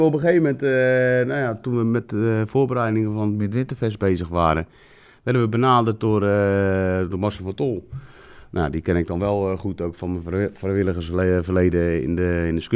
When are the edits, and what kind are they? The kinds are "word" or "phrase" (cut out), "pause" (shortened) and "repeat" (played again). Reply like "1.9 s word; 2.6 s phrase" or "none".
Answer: none